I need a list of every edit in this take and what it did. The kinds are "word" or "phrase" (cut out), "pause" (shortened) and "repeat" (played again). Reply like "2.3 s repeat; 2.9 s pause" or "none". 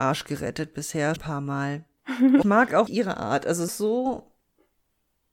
1.2 s word; 2.4 s phrase; 2.9 s word; 3.7 s phrase